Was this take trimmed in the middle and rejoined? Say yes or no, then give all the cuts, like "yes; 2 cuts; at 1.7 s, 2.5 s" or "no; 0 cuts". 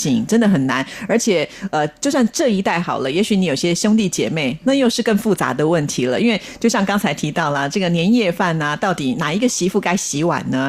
no; 0 cuts